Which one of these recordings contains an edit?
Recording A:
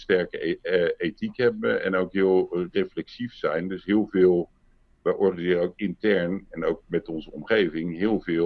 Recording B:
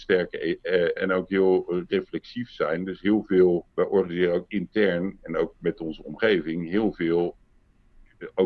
B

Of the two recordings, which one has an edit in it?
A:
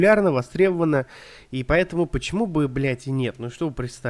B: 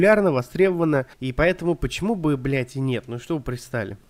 B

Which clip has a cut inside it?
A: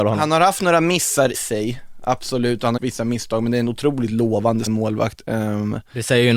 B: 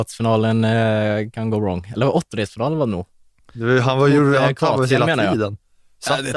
A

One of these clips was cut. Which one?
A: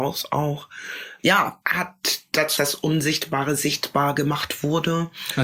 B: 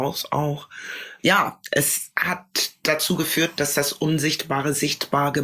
A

